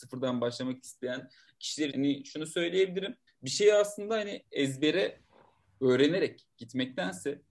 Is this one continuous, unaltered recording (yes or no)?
no